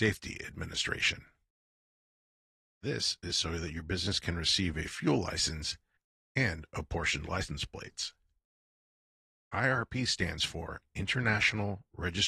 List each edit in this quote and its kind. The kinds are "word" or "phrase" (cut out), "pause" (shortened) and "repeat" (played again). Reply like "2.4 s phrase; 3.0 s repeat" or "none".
none